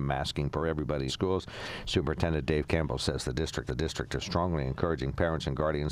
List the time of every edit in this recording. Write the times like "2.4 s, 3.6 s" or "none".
1.1 s, 3.7 s